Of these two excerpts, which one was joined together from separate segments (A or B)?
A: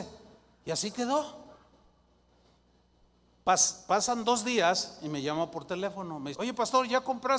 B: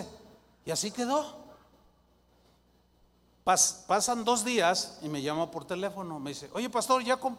A